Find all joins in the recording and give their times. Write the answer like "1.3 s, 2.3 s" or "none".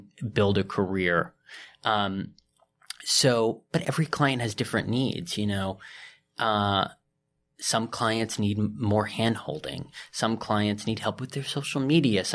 3.8 s